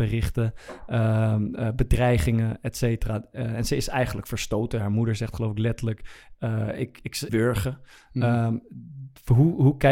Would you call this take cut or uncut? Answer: cut